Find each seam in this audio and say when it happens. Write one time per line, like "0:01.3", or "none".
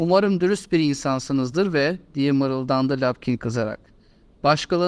none